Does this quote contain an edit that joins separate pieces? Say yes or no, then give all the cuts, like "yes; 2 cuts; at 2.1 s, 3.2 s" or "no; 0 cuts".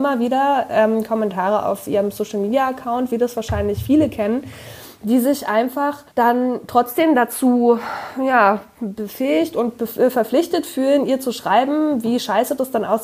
yes; 1 cut; at 6.1 s